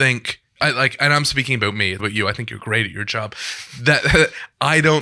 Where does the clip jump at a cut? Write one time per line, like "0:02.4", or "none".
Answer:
0:02.0